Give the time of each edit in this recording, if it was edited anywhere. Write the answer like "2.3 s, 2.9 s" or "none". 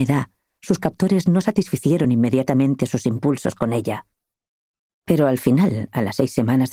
none